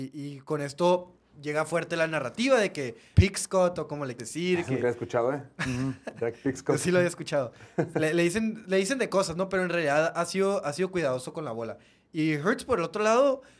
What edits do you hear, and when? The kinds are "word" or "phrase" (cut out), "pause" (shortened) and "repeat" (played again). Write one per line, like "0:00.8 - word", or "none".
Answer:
0:01.3 - word
0:03.1 - word
0:04.2 - word